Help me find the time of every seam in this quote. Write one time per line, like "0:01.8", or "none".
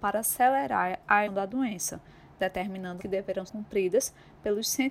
0:01.3
0:03.0
0:03.5